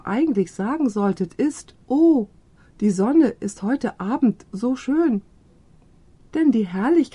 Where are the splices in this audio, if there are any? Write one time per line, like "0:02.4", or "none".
0:01.8